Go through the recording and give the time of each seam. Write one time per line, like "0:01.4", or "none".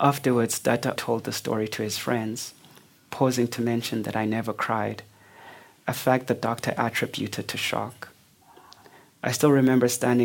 0:01.0